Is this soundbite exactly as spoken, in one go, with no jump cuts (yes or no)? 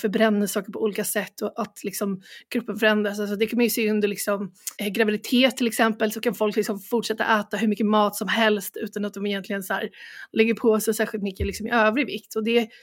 no